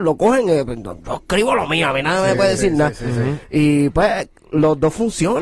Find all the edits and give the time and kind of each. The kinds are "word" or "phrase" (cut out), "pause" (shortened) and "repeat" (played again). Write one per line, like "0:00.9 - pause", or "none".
none